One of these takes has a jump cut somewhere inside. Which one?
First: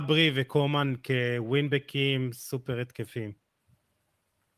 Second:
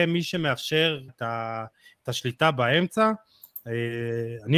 second; 1 cut; at 1.1 s

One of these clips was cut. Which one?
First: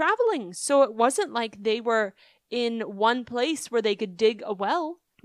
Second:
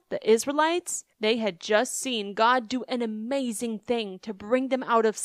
second; 1 cut; at 1.1 s

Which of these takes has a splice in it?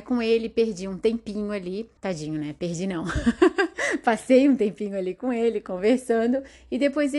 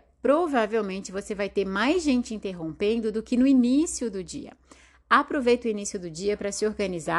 first; 1 cut; at 2.0 s

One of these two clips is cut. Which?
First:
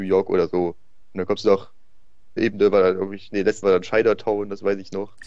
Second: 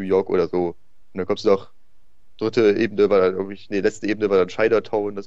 first; 2 cuts; at 2.4 s, 3.6 s

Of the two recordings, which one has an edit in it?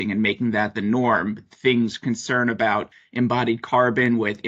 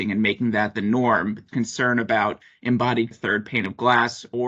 second; 2 cuts; at 1.5 s, 3.1 s

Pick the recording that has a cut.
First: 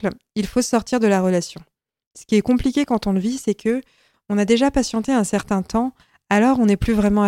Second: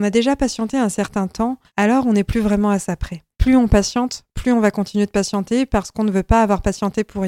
second; 2 cuts; at 1.7 s, 3.3 s

